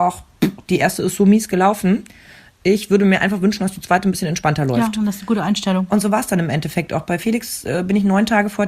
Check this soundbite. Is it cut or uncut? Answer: uncut